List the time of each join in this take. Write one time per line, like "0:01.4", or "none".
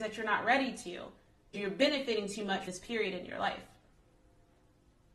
0:01.5
0:02.7